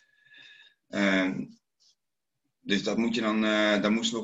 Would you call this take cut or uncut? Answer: uncut